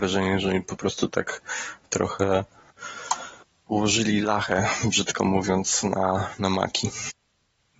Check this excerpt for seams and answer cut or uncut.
uncut